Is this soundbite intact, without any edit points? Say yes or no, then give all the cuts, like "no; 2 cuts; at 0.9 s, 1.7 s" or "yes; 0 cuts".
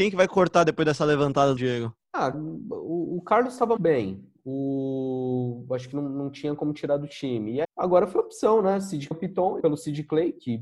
no; 6 cuts; at 1.6 s, 2.3 s, 3.8 s, 7.6 s, 9.1 s, 9.6 s